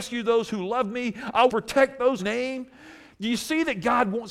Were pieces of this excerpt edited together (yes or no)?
yes